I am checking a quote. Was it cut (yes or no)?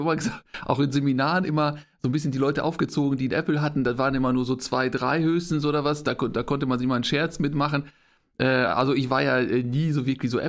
no